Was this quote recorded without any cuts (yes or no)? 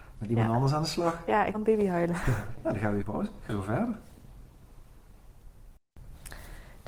no